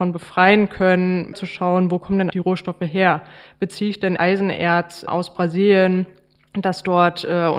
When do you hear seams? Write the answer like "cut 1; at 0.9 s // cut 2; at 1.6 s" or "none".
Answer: cut 1; at 1.3 s // cut 2; at 2.3 s // cut 3; at 4.2 s

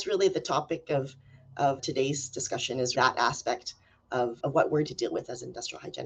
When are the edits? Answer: cut 1; at 1.8 s // cut 2; at 2.9 s // cut 3; at 4.4 s // cut 4; at 4.9 s

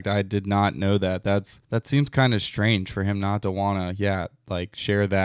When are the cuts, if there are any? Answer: cut 1; at 1.6 s

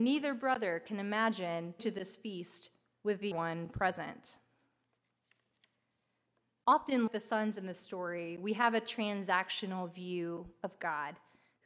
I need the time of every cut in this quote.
cut 1; at 1.8 s // cut 2; at 3.3 s // cut 3; at 7.1 s

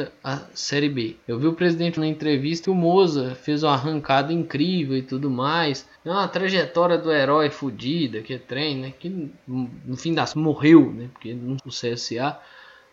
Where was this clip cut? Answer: cut 1; at 1.2 s // cut 2; at 2.0 s // cut 3; at 2.6 s // cut 4; at 6.0 s // cut 5; at 10.3 s // cut 6; at 11.6 s

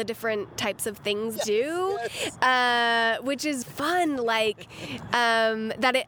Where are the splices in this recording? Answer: cut 1; at 1.4 s // cut 2; at 3.6 s

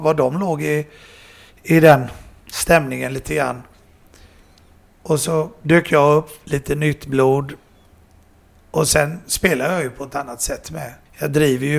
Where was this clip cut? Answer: none

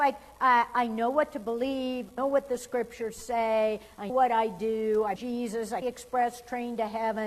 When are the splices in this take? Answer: cut 1; at 2.2 s // cut 2; at 4.1 s // cut 3; at 5.2 s // cut 4; at 5.8 s

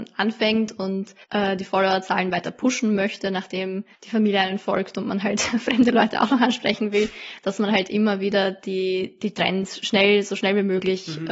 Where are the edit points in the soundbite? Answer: cut 1; at 1.2 s // cut 2; at 3.9 s

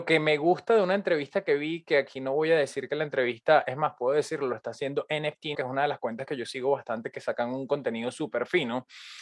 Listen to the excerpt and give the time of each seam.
cut 1; at 5.5 s

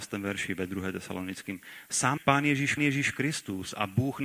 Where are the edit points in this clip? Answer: cut 1; at 2.2 s // cut 2; at 2.8 s

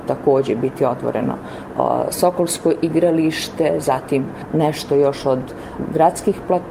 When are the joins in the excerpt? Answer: none

